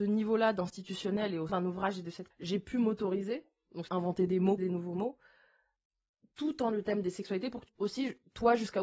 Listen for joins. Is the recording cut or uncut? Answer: cut